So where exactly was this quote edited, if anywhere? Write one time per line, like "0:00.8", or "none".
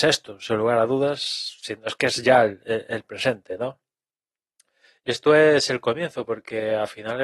none